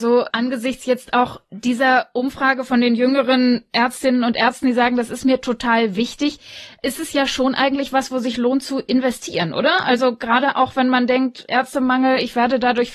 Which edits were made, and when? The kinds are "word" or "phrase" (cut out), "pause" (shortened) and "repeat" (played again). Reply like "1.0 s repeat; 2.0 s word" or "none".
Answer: none